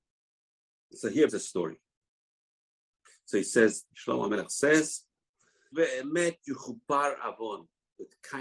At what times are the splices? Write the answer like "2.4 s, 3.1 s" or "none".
1.3 s, 3.9 s, 5.7 s